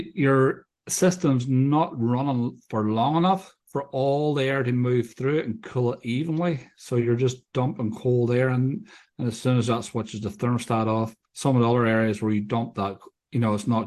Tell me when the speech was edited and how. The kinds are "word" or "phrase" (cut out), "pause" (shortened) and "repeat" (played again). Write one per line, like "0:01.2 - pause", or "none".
0:03.6 - pause
0:11.2 - pause